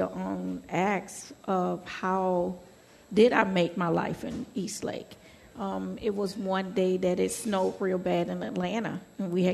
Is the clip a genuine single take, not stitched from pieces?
yes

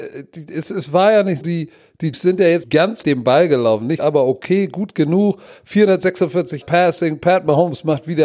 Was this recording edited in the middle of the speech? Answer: yes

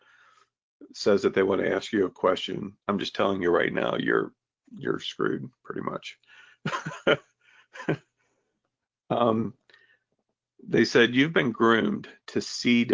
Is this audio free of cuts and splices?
no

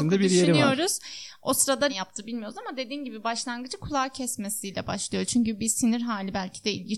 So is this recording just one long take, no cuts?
no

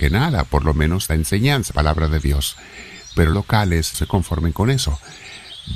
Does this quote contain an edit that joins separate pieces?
yes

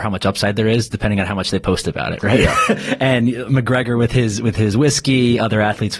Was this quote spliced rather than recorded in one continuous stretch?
no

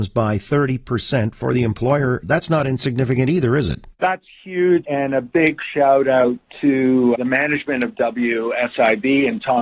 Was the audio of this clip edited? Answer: yes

